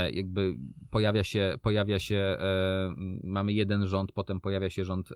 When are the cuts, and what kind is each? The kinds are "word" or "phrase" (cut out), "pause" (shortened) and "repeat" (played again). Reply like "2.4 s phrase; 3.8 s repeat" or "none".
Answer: none

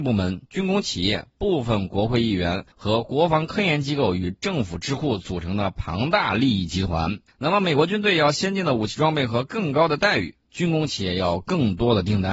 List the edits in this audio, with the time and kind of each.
2.7 s pause; 7.3 s pause

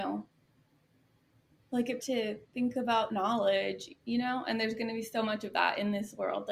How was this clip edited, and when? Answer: 2.0 s phrase; 3.1 s phrase

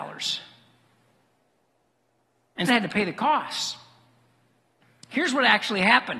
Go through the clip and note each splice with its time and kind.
2.7 s word

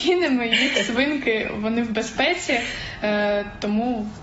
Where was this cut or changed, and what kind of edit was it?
none

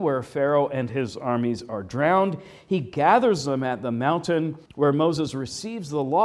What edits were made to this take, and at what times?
4.7 s pause

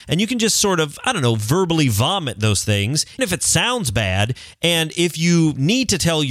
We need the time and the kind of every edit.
3.2 s word

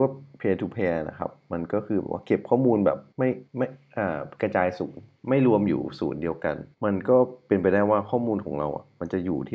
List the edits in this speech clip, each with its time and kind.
3.1 s pause; 3.5 s pause; 5.1 s pause; 6.7 s pause

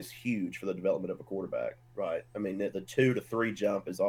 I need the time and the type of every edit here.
2.7 s word

